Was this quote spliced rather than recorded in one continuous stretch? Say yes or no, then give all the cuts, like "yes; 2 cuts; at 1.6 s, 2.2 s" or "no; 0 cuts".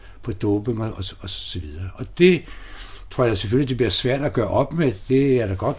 no; 0 cuts